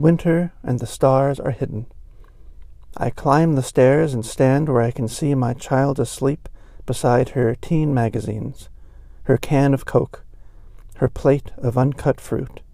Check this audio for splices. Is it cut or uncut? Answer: uncut